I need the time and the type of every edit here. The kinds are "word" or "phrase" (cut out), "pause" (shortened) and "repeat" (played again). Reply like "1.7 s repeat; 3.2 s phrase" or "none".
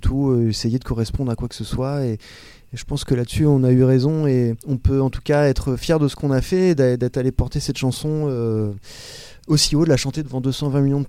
4.6 s pause